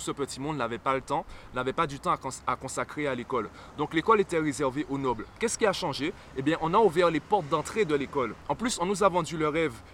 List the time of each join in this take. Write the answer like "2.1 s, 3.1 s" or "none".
none